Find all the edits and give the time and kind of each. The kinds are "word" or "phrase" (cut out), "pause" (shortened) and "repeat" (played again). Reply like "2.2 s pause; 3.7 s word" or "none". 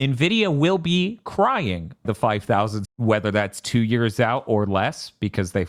2.0 s word; 2.8 s word